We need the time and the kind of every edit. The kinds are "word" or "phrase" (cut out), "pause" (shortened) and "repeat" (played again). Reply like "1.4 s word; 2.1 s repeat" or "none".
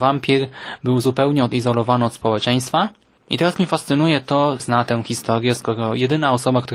3.2 s pause; 4.6 s phrase